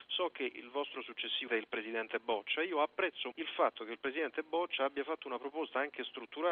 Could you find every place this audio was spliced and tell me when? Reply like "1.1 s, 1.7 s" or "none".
1.5 s, 3.3 s